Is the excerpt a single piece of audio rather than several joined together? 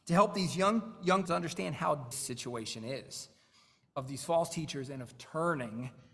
no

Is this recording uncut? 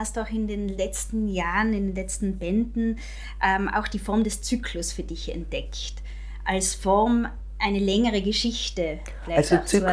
yes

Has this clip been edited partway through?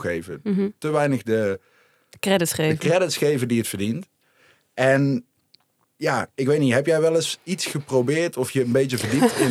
no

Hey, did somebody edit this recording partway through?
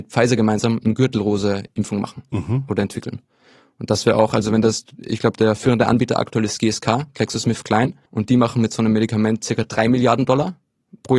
yes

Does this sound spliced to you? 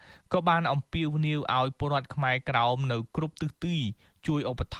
no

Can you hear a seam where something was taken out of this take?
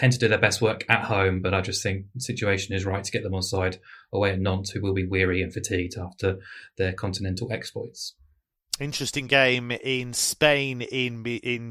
no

